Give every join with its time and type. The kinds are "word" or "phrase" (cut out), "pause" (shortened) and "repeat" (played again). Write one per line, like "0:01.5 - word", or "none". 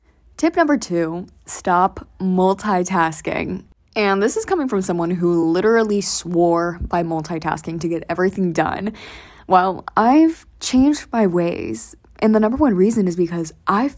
none